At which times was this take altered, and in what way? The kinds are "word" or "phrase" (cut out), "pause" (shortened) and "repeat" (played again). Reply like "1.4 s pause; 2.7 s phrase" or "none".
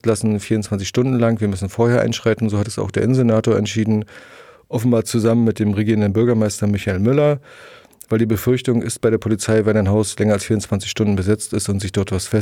none